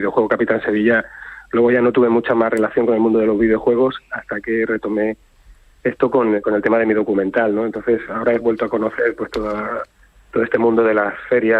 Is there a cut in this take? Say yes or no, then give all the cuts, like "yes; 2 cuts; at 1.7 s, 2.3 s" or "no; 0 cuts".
no; 0 cuts